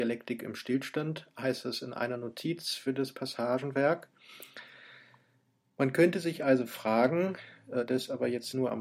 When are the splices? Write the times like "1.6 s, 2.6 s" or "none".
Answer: none